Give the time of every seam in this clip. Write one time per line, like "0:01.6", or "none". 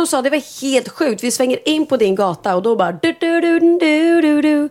none